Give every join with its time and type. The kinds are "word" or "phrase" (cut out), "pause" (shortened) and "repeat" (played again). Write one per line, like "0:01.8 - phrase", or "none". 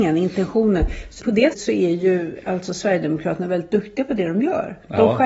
0:01.2 - word
0:01.5 - word